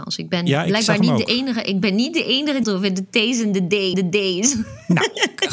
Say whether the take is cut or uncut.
cut